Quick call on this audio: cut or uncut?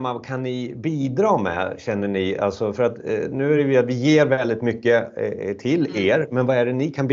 uncut